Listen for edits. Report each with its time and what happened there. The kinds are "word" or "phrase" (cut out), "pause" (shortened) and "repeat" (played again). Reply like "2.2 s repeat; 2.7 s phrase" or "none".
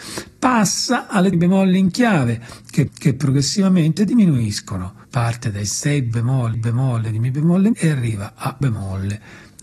1.3 s phrase; 2.9 s repeat; 5.0 s pause; 6.5 s repeat; 7.7 s word; 8.6 s word